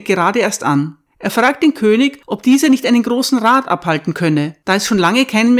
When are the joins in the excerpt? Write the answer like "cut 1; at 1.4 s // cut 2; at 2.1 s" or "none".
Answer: cut 1; at 1.1 s